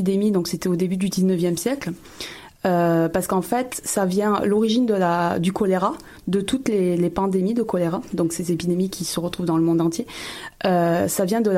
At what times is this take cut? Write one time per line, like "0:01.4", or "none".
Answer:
none